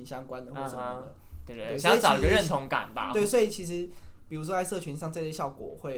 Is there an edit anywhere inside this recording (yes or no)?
no